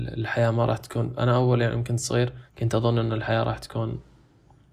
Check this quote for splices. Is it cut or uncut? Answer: cut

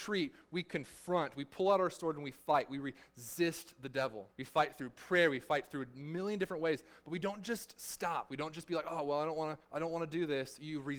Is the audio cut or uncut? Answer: cut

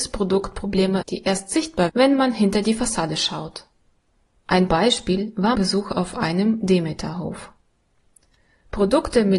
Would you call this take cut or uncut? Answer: cut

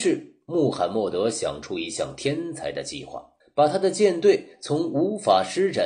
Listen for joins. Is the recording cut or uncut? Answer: cut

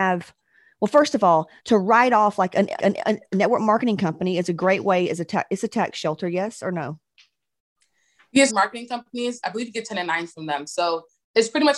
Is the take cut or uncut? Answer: cut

